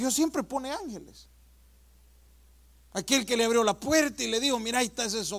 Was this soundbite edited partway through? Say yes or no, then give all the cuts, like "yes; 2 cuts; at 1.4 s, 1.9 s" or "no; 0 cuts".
no; 0 cuts